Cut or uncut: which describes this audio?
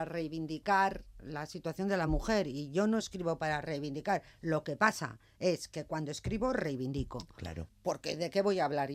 uncut